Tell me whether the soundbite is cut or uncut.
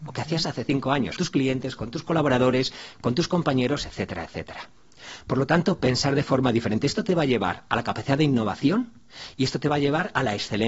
cut